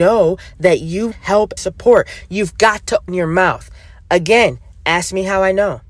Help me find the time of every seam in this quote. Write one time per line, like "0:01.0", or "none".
0:01.1
0:01.6
0:03.1